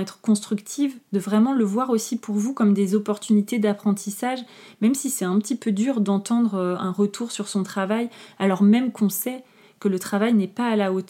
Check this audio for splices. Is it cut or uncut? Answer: uncut